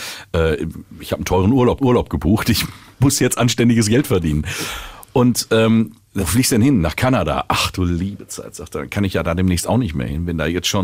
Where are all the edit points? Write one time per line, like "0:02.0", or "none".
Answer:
0:01.8
0:06.2